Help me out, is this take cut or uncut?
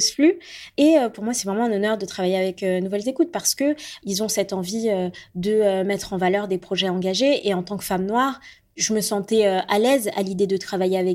uncut